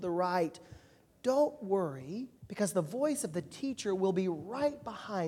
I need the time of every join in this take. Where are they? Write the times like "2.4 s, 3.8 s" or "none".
2.4 s